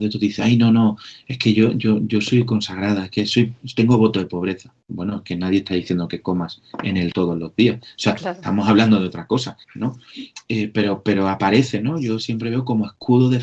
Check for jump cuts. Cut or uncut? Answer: cut